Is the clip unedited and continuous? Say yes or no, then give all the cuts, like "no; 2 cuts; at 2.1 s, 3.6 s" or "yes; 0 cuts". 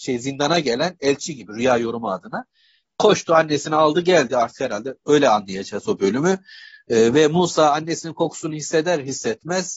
no; 1 cut; at 5.0 s